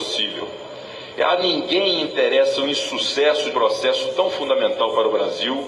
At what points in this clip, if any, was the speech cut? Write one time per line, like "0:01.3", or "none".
0:03.5